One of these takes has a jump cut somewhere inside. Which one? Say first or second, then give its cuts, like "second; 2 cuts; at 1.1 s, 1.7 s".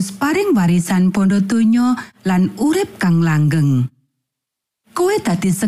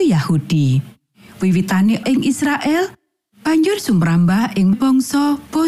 second; 2 cuts; at 2.0 s, 4.7 s